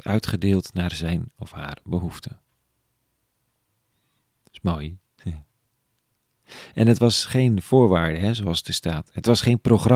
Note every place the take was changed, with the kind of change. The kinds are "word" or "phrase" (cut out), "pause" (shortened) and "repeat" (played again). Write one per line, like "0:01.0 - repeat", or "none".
none